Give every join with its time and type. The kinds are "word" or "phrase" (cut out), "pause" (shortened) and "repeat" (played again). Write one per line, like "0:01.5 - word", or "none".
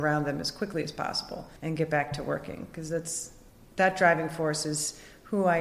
0:01.6 - pause
0:03.5 - pause